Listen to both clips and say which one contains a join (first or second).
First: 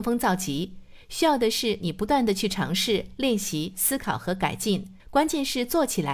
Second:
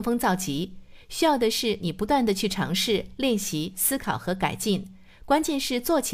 first